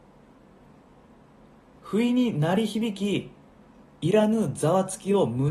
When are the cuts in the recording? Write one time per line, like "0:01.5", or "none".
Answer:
none